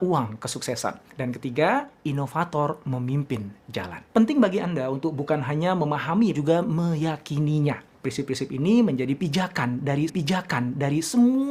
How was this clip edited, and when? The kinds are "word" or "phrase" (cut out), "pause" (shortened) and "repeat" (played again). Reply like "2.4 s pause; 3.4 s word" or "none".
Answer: 4.1 s pause; 6.3 s phrase; 10.1 s repeat